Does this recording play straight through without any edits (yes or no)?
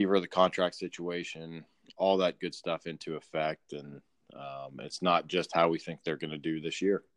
yes